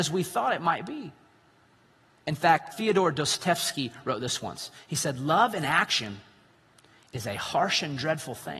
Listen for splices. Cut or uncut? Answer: cut